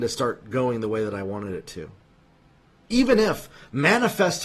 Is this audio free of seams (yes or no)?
yes